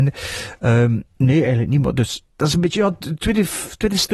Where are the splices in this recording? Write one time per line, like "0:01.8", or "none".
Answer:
0:01.1
0:02.3